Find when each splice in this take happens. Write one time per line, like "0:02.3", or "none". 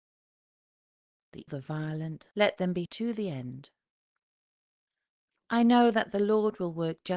0:01.5
0:02.3
0:02.9